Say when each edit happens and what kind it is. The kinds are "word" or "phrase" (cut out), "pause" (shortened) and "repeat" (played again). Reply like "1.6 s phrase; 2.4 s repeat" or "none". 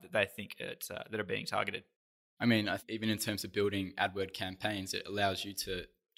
2.8 s word